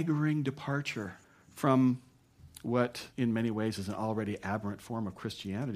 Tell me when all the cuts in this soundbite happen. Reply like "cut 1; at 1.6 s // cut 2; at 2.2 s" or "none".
cut 1; at 1.2 s // cut 2; at 3.1 s